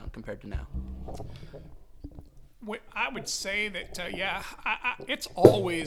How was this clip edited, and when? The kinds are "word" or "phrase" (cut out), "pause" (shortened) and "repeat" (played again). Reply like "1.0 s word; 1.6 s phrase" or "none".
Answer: none